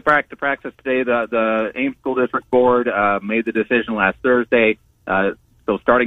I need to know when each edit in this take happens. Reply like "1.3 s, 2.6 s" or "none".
none